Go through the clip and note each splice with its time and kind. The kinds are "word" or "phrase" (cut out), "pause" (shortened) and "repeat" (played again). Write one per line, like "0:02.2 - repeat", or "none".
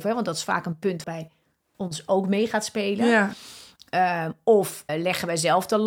0:01.0 - word
0:04.9 - word